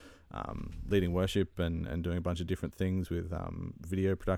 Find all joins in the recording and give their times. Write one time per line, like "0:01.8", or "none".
none